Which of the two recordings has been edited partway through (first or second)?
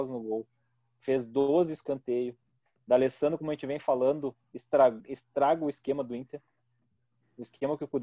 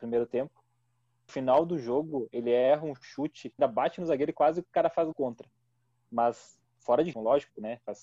second